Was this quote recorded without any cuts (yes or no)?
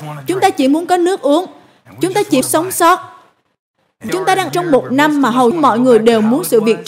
no